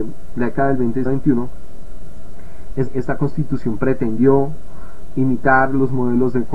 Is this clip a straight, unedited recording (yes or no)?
no